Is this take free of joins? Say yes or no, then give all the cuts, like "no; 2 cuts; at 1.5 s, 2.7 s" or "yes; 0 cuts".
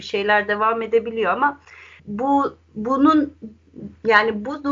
no; 1 cut; at 2.0 s